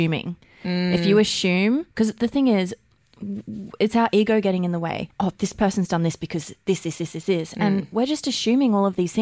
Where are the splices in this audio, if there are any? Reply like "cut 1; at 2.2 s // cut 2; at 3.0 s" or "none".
cut 1; at 1.9 s // cut 2; at 5.1 s